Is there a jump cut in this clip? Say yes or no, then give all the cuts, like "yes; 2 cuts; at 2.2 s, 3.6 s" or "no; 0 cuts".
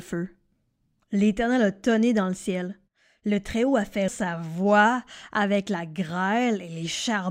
yes; 1 cut; at 4.1 s